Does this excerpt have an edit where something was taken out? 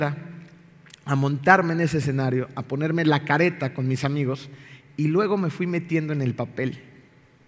no; 0 cuts

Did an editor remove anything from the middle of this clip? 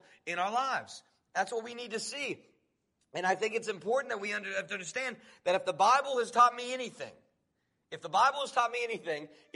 no; 0 cuts

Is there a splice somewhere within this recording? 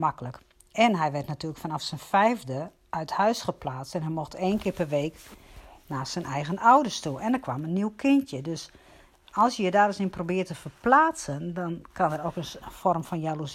no; 0 cuts

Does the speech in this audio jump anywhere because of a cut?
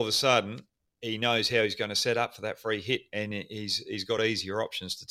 no; 0 cuts

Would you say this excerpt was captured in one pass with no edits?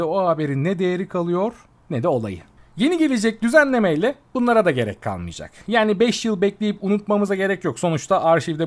yes; 0 cuts

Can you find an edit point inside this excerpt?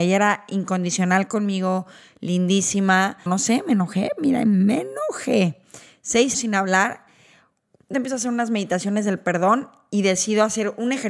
yes; 3 cuts; at 3.3 s, 6.3 s, 7.9 s

